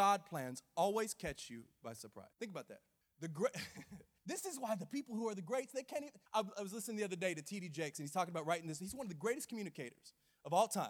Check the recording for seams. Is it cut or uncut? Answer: cut